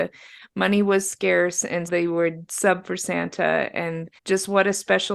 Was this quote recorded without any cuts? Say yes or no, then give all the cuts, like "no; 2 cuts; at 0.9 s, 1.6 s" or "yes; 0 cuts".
no; 2 cuts; at 1.9 s, 4.2 s